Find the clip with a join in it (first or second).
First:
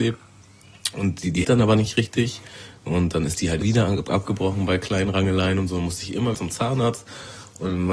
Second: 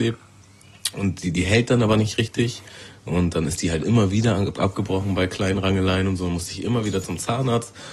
first